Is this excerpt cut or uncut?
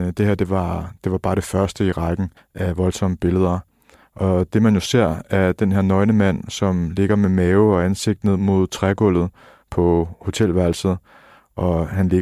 cut